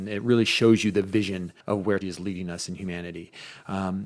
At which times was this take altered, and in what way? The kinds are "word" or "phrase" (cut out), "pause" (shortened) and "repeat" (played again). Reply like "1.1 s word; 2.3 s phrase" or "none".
1.6 s pause; 2.0 s word